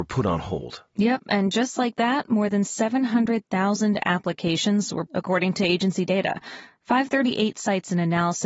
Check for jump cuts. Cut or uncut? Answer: cut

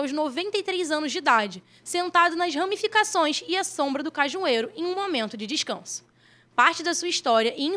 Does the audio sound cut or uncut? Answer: uncut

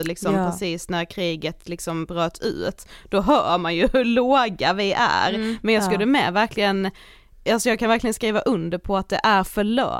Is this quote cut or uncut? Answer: uncut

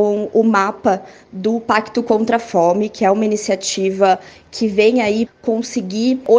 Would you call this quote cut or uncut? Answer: cut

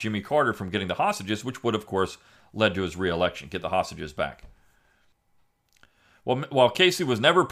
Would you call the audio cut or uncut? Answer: uncut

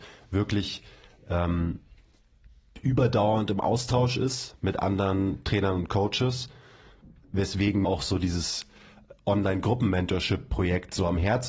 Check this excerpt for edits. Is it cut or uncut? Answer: cut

